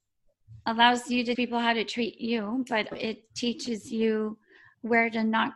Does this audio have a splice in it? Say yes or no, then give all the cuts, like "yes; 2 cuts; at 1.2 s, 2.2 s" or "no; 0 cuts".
yes; 2 cuts; at 1.3 s, 2.9 s